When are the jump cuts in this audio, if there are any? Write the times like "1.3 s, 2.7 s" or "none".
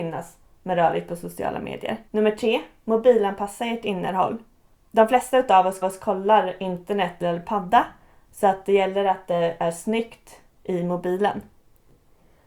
2.1 s, 5.8 s, 7.2 s, 10.5 s